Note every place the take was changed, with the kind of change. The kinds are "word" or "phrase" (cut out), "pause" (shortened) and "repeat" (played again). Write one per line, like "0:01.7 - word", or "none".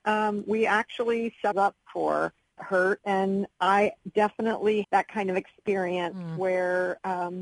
0:01.5 - word
0:02.6 - word
0:03.5 - word
0:04.8 - word